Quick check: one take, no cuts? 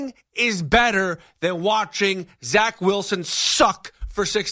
yes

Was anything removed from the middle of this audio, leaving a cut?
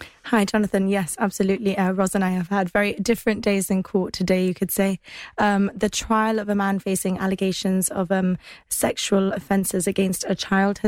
no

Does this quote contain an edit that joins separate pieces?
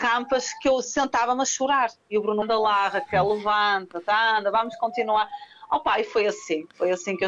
yes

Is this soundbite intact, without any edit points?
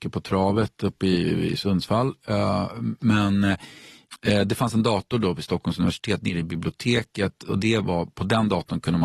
yes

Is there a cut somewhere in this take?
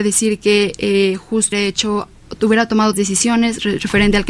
yes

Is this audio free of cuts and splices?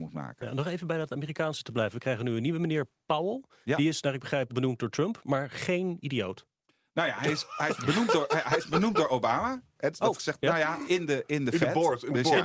no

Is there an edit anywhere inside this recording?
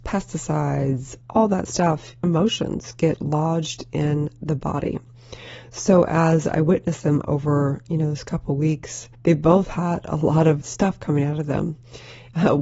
yes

